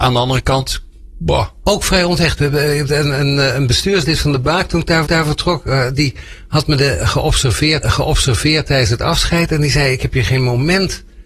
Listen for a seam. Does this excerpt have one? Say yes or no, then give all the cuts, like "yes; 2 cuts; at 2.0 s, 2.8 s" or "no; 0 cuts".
yes; 2 cuts; at 5.0 s, 7.8 s